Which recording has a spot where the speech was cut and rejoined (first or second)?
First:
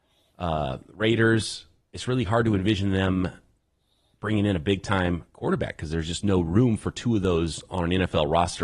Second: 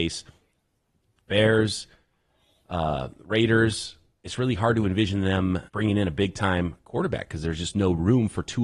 second